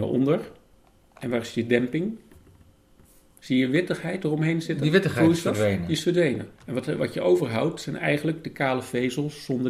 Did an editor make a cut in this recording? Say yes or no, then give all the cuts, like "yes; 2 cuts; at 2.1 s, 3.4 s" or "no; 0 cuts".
yes; 3 cuts; at 0.9 s, 3.0 s, 6.5 s